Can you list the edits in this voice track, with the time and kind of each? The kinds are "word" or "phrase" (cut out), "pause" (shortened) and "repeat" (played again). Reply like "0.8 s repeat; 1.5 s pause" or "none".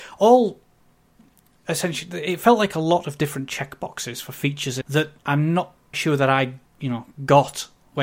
4.8 s phrase; 5.2 s pause; 5.9 s word; 6.7 s pause